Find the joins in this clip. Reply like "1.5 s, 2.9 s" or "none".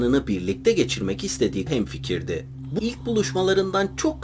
1.7 s, 2.8 s